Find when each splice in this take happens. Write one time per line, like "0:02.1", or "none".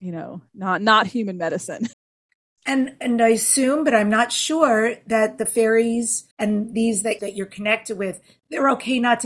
0:01.9
0:06.3
0:07.2